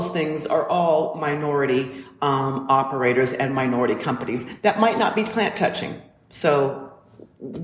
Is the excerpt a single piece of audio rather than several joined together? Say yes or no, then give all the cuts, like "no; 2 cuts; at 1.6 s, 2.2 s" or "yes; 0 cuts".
yes; 0 cuts